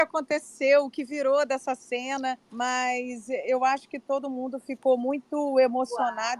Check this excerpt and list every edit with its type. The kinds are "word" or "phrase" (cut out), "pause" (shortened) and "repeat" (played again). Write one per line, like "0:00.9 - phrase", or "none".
0:02.4 - pause